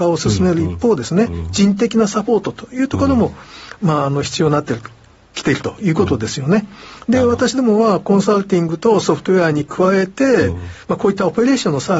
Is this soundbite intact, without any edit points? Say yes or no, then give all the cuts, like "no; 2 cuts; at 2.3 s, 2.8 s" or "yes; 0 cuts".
yes; 0 cuts